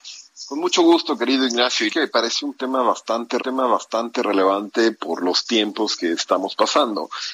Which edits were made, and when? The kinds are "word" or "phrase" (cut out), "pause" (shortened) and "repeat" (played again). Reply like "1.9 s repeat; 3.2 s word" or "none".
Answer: 1.9 s phrase; 3.4 s repeat